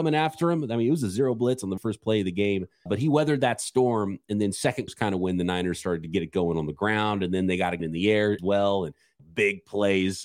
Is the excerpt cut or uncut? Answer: cut